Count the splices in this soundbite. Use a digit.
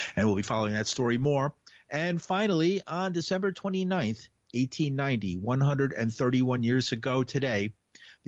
0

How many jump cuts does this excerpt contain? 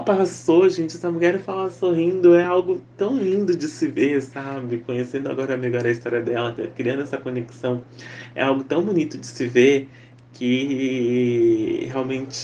0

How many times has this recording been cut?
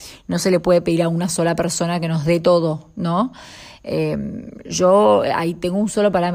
0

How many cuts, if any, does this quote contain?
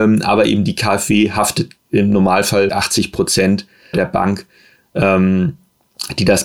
3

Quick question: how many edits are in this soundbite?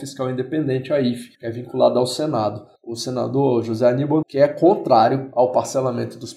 3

